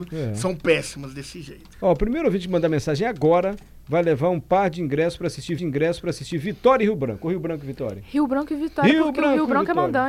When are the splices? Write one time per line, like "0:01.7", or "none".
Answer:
0:01.7
0:05.6